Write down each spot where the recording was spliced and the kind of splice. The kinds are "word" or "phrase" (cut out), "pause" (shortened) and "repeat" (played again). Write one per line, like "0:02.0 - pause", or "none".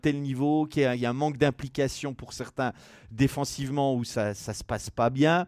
none